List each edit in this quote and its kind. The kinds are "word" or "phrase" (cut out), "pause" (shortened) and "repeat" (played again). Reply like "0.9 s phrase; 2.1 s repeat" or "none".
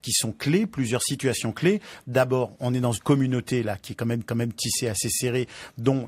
2.9 s word; 4.2 s repeat